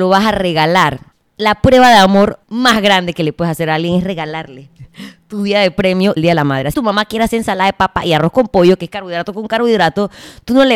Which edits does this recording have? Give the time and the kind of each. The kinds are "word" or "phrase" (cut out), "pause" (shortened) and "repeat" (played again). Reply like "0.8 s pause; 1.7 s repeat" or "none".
1.1 s pause; 2.4 s pause; 6.2 s phrase; 6.7 s word

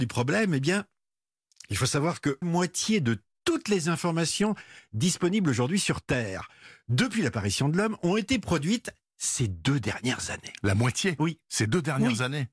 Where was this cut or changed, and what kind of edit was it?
2.4 s word

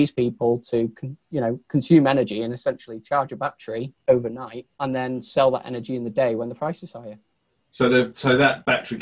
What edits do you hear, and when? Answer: 4.7 s pause

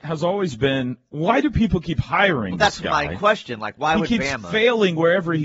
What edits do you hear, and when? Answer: none

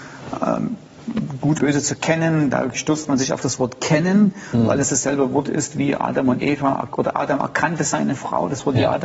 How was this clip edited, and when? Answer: 1.6 s word

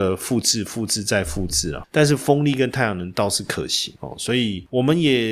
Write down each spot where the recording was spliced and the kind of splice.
1.8 s word

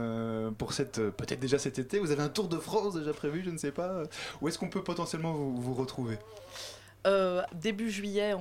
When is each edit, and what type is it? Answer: 7.5 s word

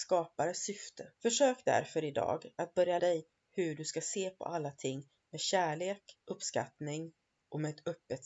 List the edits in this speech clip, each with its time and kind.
1.2 s pause; 3.0 s word; 6.2 s pause

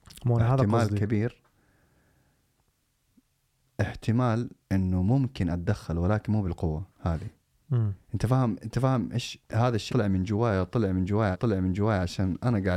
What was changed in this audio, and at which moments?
4.6 s pause; 6.9 s pause; 8.0 s pause; 9.9 s word; 11.3 s repeat

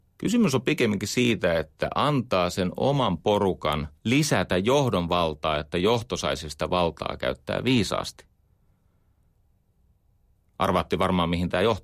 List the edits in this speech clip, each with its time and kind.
4.0 s pause

